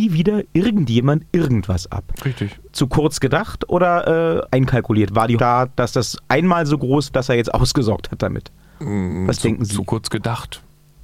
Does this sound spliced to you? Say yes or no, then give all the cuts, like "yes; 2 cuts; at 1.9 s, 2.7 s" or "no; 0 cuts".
yes; 4 cuts; at 2.7 s, 4.5 s, 5.4 s, 7.1 s